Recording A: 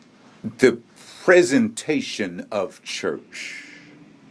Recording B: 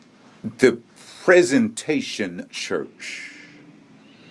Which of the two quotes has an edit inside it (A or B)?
B